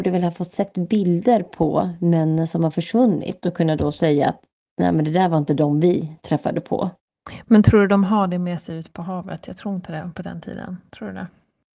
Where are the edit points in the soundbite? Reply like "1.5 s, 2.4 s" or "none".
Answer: none